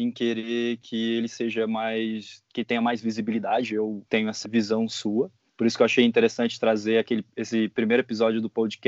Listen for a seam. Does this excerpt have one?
yes; 3 cuts; at 4.1 s, 4.4 s, 5.5 s

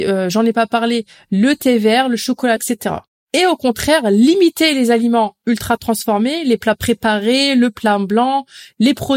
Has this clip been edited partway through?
yes; 1 cut; at 2.6 s

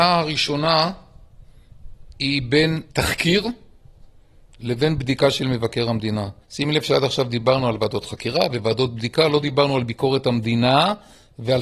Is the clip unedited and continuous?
no; 3 cuts; at 2.1 s, 2.9 s, 6.4 s

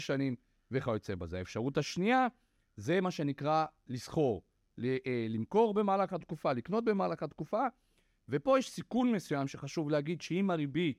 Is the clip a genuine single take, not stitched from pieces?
yes; 0 cuts

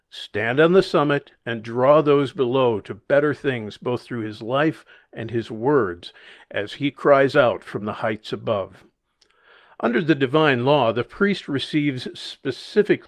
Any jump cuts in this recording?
no; 0 cuts

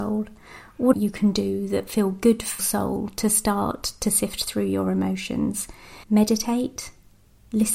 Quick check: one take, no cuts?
no; 3 cuts; at 0.9 s, 2.6 s, 6.0 s

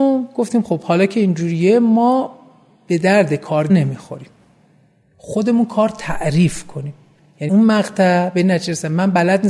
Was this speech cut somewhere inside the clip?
yes; 2 cuts; at 3.7 s, 7.5 s

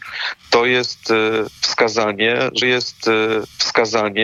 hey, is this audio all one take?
no; 1 cut; at 2.6 s

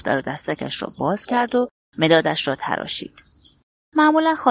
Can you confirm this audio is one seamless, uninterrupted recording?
yes; 0 cuts

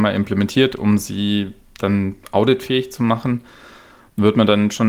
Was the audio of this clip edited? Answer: no; 0 cuts

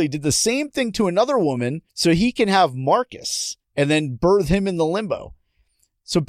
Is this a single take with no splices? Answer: no; 2 cuts; at 1.9 s, 3.6 s

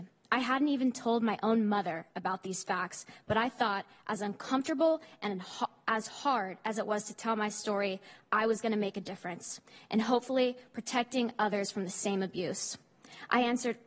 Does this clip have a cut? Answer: no; 0 cuts

